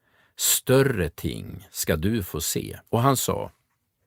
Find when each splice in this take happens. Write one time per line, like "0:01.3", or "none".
0:02.9